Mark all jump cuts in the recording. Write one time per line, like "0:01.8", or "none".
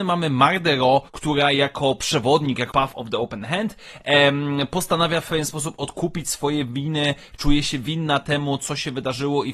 0:01.1
0:02.7